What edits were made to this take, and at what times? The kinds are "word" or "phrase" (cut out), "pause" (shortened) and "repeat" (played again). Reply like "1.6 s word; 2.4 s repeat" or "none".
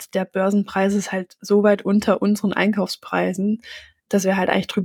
none

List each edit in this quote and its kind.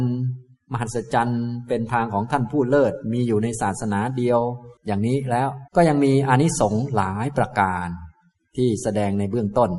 4.8 s pause; 5.7 s pause

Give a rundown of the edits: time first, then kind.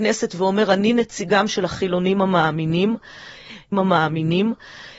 3.7 s repeat

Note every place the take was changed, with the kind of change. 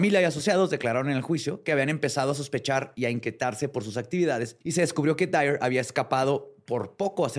4.6 s pause

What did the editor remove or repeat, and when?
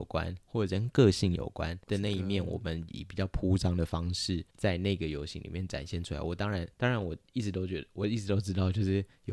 1.8 s pause; 4.5 s pause; 6.7 s pause

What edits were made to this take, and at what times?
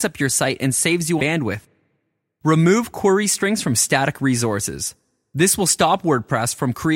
1.2 s word

